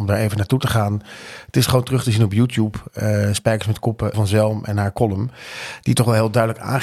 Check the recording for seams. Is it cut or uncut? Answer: cut